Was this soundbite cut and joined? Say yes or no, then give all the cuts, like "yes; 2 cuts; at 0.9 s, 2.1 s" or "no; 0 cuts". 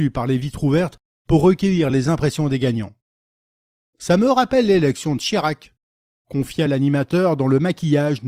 no; 0 cuts